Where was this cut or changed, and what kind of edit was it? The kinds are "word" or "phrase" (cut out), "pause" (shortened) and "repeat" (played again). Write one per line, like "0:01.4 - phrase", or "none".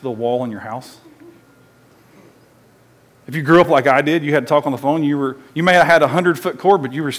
none